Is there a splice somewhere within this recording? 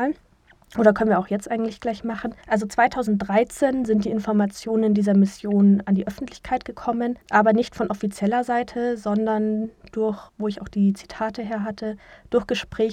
yes; 3 cuts; at 2.4 s, 7.2 s, 10.3 s

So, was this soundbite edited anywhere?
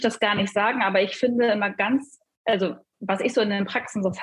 no; 0 cuts

